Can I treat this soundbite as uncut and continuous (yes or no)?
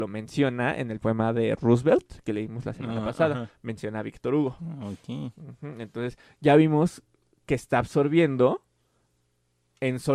yes